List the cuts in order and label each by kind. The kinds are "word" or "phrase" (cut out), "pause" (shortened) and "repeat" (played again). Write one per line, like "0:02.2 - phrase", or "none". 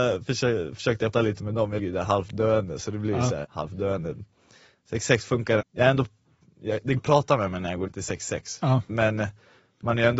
0:01.1 - word
0:01.8 - word
0:03.4 - word
0:05.6 - word
0:07.0 - word
0:07.9 - word
0:08.9 - word

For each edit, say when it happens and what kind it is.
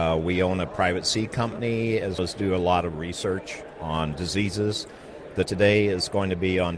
0:02.2 - word
0:05.5 - word

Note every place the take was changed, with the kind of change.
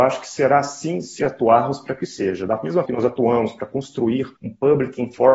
0:01.2 - phrase
0:02.8 - word
0:04.4 - pause

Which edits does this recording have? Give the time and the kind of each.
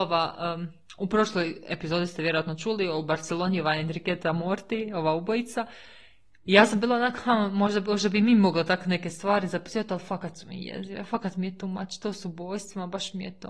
none

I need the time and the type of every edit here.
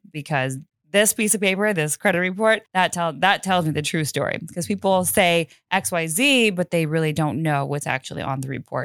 0:02.7 - pause

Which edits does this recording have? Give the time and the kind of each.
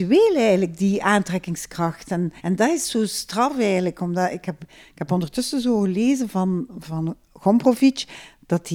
0:02.4 - pause

